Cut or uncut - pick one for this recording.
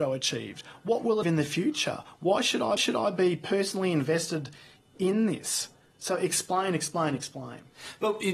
cut